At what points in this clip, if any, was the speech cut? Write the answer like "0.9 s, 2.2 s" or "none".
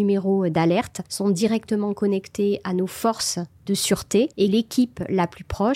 1.1 s, 4.3 s